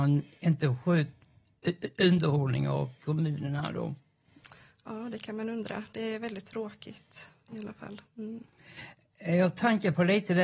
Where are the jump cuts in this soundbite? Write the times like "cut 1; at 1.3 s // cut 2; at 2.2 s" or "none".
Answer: cut 1; at 8.1 s